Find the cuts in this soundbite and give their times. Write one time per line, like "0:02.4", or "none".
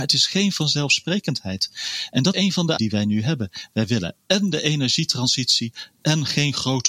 0:02.3
0:02.8